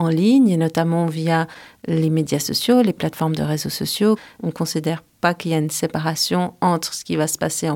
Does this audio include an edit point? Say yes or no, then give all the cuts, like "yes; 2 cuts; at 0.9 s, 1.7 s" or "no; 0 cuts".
no; 0 cuts